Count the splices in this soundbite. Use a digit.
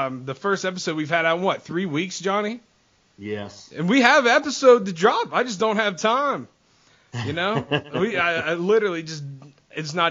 0